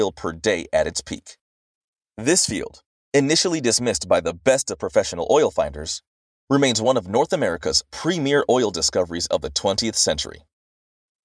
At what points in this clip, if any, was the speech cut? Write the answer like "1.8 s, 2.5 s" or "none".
none